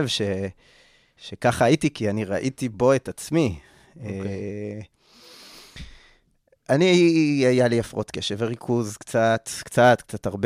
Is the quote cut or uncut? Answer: uncut